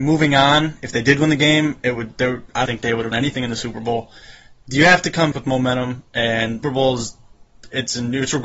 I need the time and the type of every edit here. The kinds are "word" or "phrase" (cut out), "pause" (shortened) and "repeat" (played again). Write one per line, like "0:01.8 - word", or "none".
0:02.7 - word
0:03.1 - word
0:05.3 - word
0:06.6 - word